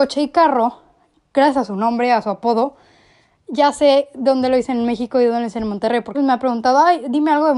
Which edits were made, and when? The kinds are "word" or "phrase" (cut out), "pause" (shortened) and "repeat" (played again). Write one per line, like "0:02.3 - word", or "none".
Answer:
0:06.1 - word